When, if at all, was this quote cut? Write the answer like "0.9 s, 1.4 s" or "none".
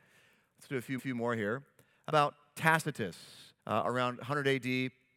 1.0 s, 2.1 s, 3.6 s